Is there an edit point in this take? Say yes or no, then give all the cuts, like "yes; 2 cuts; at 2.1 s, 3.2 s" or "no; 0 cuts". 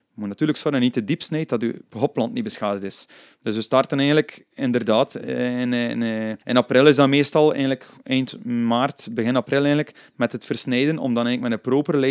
yes; 1 cut; at 6.4 s